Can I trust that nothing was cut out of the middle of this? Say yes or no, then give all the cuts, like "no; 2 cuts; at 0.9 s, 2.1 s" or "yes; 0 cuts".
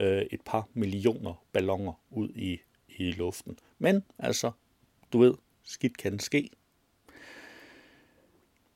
yes; 0 cuts